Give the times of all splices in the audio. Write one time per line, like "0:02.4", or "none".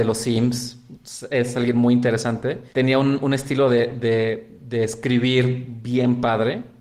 0:02.7